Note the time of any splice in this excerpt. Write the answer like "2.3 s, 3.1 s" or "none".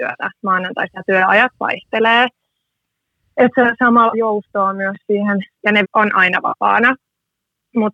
0.9 s, 4.1 s, 5.5 s, 5.8 s